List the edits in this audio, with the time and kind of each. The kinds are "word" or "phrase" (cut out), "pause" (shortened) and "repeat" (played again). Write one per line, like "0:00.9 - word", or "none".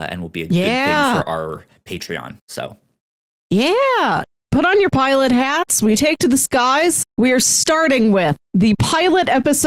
0:02.4 - pause
0:07.1 - pause
0:08.4 - pause